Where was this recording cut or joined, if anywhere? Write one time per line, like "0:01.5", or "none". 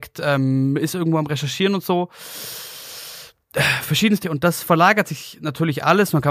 0:04.2